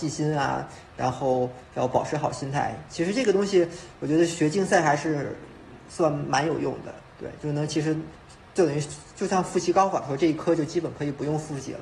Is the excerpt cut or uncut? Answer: uncut